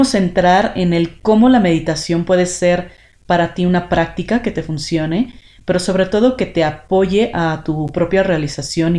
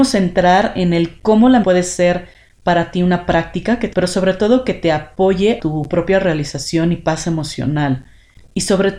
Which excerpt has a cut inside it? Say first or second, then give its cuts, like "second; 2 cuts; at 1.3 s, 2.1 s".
second; 3 cuts; at 1.6 s, 3.9 s, 5.6 s